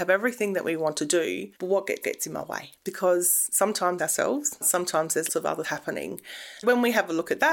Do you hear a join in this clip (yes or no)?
yes